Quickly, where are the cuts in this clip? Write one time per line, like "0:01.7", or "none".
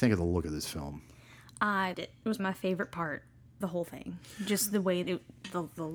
0:01.9
0:02.4
0:03.6
0:05.0